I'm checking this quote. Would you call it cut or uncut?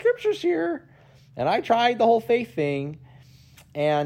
uncut